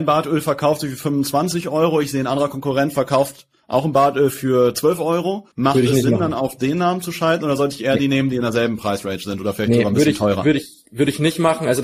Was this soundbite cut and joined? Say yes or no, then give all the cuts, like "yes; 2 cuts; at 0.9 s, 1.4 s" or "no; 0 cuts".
yes; 1 cut; at 5.5 s